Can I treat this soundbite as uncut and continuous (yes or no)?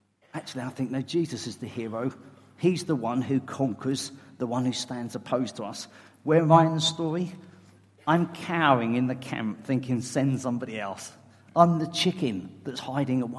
yes